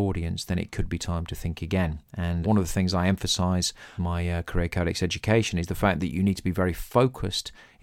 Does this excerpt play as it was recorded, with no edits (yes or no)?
no